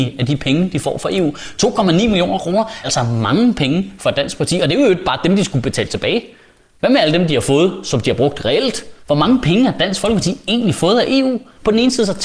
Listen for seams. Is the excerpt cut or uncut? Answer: cut